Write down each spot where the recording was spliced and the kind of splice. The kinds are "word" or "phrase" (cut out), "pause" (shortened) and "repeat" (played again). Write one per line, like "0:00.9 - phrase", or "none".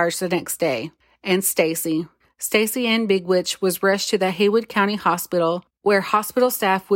none